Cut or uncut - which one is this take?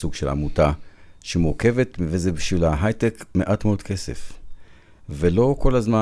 uncut